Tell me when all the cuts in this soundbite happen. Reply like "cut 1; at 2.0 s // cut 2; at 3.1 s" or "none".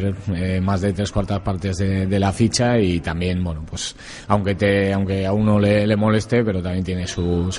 none